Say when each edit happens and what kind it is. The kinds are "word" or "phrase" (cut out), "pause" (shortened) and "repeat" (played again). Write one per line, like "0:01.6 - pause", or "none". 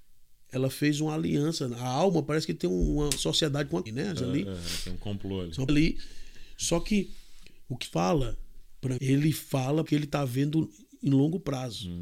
0:03.9 - word
0:04.2 - word
0:05.7 - word
0:07.8 - word
0:09.0 - word
0:09.9 - word